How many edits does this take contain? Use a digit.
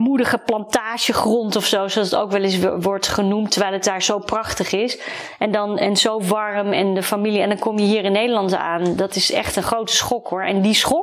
0